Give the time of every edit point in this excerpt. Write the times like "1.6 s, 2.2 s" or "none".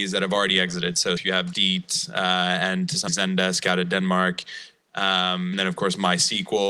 1.2 s, 1.5 s, 3.1 s, 5.5 s